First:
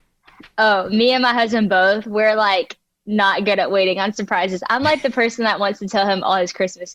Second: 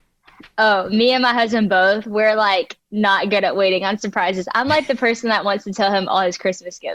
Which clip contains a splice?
second; 1 cut; at 2.8 s

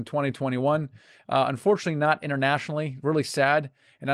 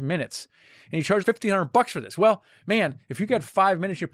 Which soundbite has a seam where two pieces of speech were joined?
second; 1 cut; at 1.2 s

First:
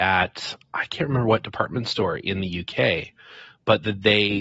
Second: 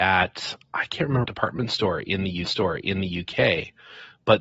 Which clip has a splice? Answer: second; 2 cuts; at 1.2 s, 2.4 s

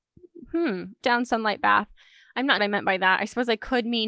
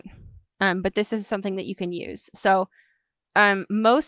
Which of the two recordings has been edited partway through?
first; 2 cuts; at 1.0 s, 2.6 s

